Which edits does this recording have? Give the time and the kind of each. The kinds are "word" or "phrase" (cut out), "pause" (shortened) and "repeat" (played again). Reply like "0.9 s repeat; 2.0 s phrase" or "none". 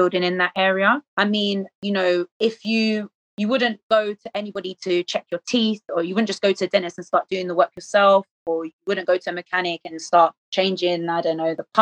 1.1 s pause; 2.3 s pause; 3.2 s pause; 10.4 s pause